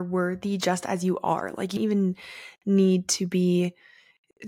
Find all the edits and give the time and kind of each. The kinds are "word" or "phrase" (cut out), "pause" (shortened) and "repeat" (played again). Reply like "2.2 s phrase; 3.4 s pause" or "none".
1.8 s word